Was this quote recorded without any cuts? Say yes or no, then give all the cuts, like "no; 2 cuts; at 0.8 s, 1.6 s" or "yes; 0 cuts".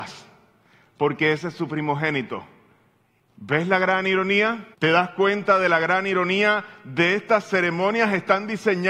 no; 1 cut; at 4.7 s